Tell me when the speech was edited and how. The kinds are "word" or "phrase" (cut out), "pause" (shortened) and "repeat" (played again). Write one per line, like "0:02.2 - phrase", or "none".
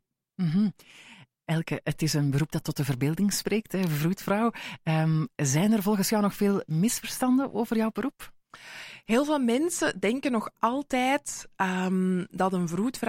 none